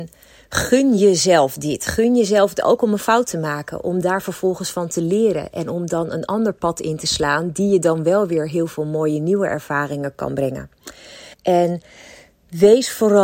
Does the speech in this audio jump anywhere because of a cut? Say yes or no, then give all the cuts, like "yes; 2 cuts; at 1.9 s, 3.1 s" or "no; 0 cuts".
yes; 1 cut; at 11.3 s